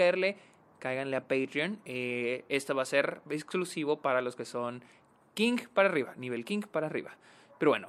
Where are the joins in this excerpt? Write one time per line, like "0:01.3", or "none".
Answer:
none